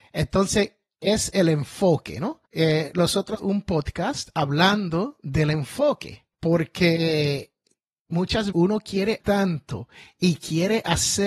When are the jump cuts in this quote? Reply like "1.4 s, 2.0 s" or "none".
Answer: 2.5 s, 3.4 s, 6.3 s, 8.5 s, 9.2 s